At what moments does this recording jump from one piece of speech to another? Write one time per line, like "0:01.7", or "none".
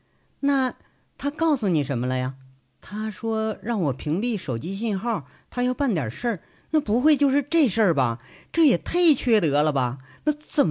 0:02.6